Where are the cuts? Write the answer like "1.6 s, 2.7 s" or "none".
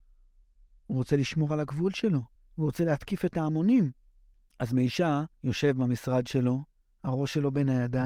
2.3 s, 4.3 s, 5.3 s, 6.7 s